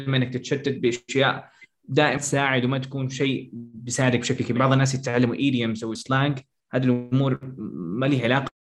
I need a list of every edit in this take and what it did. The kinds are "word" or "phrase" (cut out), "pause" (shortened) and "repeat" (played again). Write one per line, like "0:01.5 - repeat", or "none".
0:02.2 - word
0:04.6 - word
0:05.9 - word